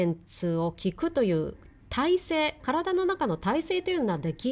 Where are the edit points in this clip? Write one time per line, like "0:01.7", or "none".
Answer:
none